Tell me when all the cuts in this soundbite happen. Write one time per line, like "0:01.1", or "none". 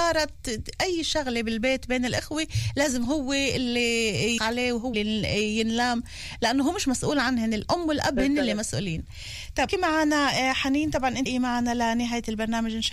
0:04.4
0:04.9
0:09.7
0:11.3